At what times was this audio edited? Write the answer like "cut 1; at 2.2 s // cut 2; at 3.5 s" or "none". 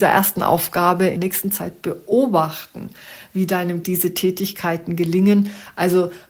cut 1; at 1.2 s // cut 2; at 3.8 s